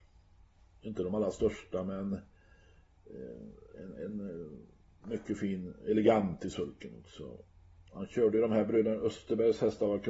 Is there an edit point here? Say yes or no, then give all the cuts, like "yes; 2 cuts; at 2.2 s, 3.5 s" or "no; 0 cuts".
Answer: no; 0 cuts